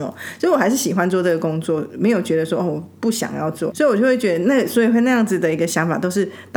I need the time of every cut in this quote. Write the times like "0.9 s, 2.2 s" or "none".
3.7 s

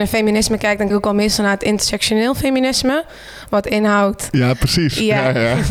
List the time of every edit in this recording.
0.9 s

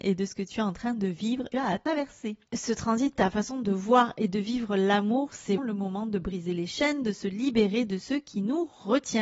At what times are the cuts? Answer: 1.5 s, 3.2 s, 5.6 s

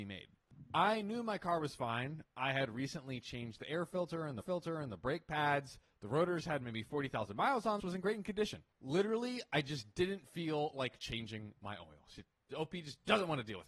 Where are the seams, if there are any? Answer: 4.4 s, 7.8 s, 8.7 s

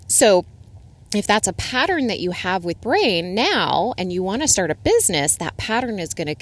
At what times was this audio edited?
2.8 s

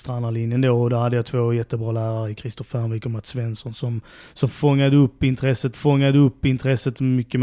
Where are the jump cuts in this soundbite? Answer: 5.7 s

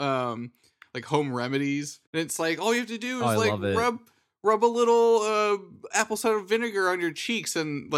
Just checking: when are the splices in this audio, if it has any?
2.1 s

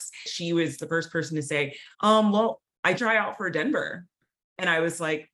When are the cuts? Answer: 1.9 s, 3.0 s

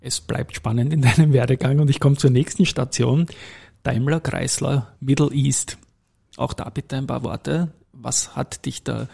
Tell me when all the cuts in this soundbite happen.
none

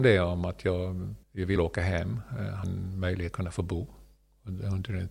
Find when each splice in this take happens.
1.2 s, 1.6 s, 2.6 s, 3.3 s

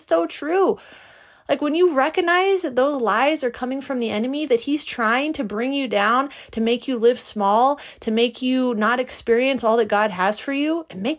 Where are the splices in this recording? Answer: none

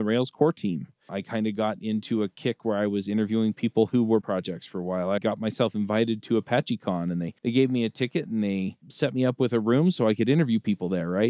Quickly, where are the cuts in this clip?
4.2 s, 5.2 s, 7.4 s

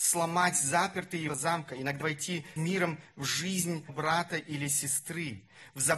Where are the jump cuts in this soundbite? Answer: 1.3 s, 2.0 s, 2.6 s, 3.9 s

